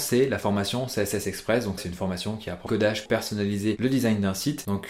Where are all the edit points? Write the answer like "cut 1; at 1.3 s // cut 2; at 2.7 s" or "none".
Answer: cut 1; at 1.8 s // cut 2; at 2.7 s // cut 3; at 3.1 s